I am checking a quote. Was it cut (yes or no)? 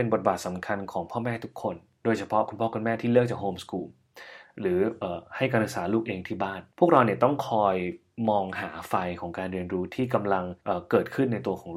yes